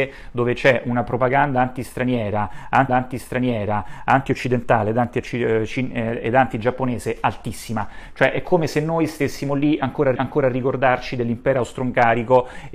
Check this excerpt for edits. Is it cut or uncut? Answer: cut